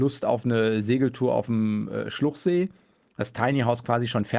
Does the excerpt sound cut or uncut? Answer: uncut